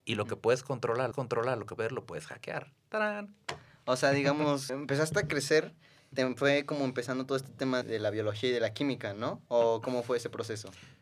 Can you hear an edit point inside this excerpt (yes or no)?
yes